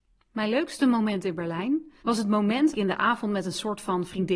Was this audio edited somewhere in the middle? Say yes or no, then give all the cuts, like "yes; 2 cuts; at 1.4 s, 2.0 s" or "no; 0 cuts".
yes; 2 cuts; at 2.0 s, 2.7 s